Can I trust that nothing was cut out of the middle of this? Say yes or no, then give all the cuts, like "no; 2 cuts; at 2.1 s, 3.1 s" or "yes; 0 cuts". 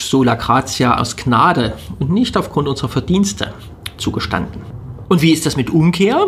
no; 1 cut; at 1.0 s